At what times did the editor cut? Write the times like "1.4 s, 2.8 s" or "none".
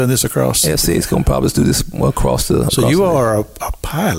none

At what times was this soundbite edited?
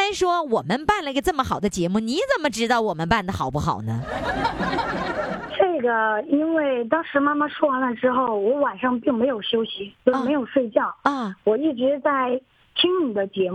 none

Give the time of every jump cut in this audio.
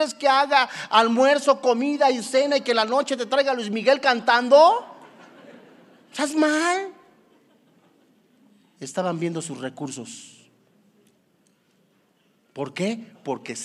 none

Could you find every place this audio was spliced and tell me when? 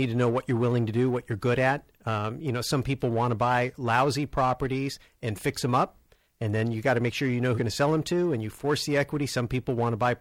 7.6 s

